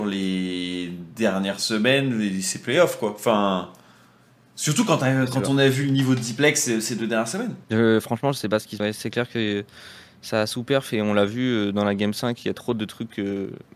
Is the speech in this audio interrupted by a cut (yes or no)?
yes